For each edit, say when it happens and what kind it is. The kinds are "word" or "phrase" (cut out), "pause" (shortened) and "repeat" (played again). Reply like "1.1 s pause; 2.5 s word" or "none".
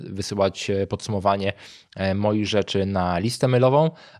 none